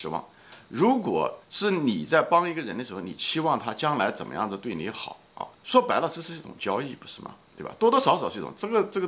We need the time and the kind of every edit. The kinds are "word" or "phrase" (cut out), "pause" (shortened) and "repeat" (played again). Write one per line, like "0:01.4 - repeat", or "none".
0:01.4 - pause
0:05.5 - pause